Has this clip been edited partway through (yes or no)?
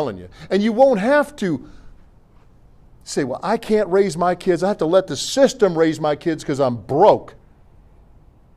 no